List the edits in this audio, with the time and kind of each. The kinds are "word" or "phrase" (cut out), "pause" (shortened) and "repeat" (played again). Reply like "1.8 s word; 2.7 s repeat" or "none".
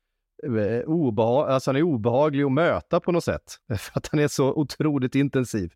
3.6 s pause